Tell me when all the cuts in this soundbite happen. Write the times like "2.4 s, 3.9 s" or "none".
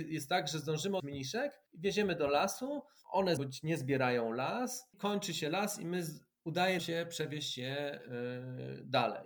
1.0 s, 3.4 s, 6.8 s